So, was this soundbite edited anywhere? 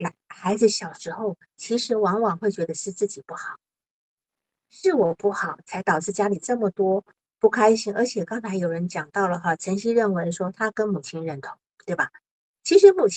no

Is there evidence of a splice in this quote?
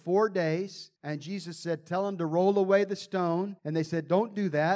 yes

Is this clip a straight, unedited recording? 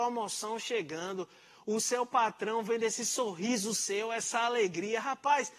yes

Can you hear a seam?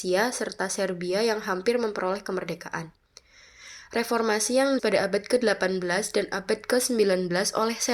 yes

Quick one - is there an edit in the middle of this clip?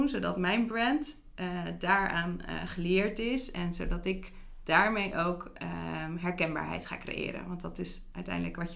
no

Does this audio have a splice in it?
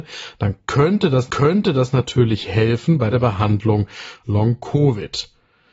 yes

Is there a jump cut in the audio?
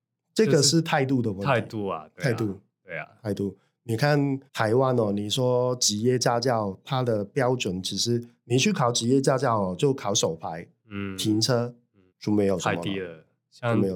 yes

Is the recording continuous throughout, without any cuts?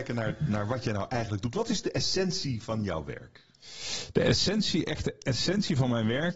yes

